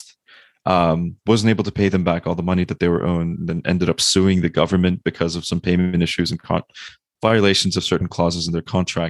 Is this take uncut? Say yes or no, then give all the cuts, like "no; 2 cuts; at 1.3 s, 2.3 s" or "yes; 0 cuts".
yes; 0 cuts